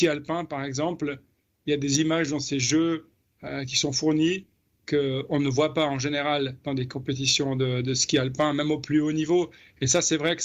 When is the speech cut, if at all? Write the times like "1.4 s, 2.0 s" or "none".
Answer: none